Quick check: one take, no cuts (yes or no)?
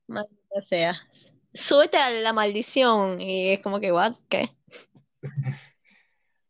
yes